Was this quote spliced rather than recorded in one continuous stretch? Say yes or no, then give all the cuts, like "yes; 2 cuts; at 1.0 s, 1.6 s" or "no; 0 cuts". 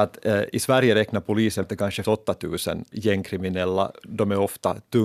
yes; 2 cuts; at 1.6 s, 2.0 s